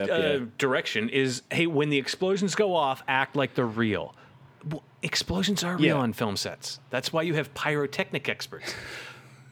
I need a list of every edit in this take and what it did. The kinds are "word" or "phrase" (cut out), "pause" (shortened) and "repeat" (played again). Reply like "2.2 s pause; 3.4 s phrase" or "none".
none